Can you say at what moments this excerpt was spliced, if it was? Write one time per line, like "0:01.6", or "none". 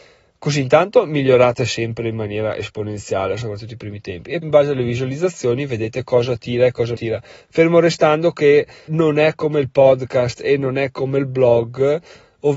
0:04.4
0:07.0
0:08.9